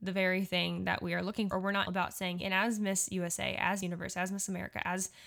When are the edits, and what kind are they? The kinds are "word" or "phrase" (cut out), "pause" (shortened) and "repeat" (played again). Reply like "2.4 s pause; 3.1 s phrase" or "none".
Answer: 1.5 s word; 1.9 s word; 2.4 s word; 3.8 s word